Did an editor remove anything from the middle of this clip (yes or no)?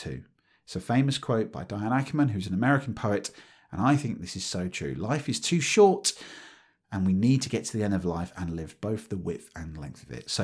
no